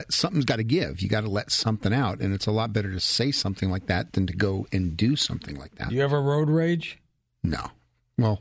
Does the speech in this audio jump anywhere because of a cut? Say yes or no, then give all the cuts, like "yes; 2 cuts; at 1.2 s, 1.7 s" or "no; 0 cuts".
no; 0 cuts